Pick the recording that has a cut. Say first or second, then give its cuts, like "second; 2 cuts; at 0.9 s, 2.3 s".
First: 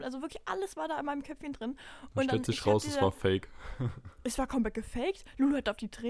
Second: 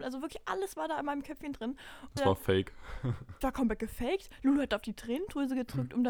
second; 2 cuts; at 2.2 s, 3.4 s